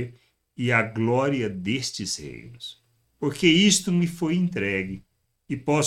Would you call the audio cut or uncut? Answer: uncut